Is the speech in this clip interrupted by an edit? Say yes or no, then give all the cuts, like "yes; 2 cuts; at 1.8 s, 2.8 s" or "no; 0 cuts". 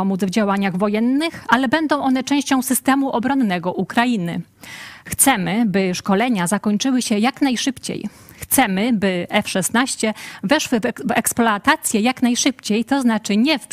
no; 0 cuts